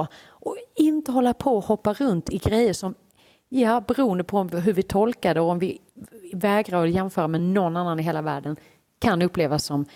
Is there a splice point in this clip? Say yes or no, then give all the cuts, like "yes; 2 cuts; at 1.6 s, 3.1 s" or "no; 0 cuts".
no; 0 cuts